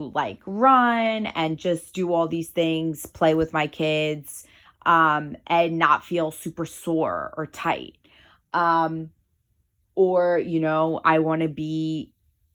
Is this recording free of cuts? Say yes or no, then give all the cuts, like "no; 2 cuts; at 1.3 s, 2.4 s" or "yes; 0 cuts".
yes; 0 cuts